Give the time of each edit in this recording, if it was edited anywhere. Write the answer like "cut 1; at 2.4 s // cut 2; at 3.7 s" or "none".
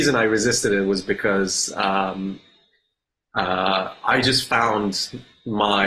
none